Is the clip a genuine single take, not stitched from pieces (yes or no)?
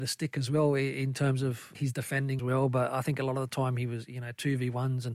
no